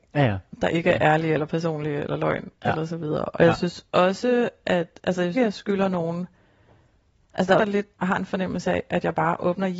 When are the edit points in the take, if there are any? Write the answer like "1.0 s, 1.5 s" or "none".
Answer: 5.3 s, 7.6 s, 7.9 s